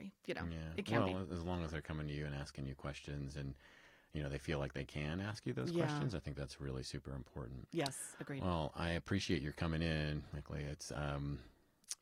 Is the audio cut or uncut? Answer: uncut